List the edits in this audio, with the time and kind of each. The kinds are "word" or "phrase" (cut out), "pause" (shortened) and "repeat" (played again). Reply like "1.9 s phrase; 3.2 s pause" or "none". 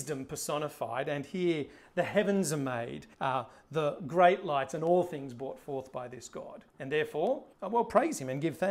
3.1 s pause; 6.7 s pause; 7.5 s pause